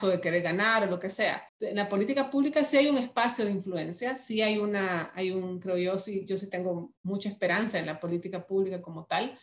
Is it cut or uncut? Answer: cut